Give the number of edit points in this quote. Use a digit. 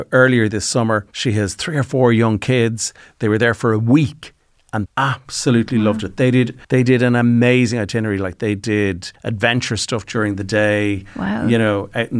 3